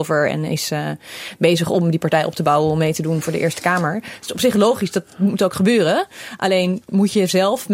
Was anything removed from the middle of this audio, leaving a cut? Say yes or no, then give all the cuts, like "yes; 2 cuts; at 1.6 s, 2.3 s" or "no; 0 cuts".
no; 0 cuts